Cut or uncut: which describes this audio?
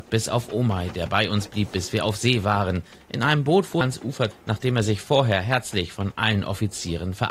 cut